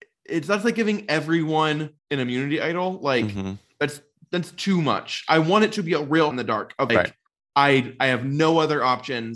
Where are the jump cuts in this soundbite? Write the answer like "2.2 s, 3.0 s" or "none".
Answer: 2.0 s, 6.3 s, 6.9 s